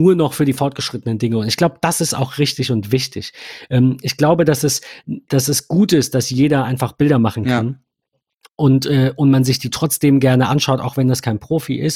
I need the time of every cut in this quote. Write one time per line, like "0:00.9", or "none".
none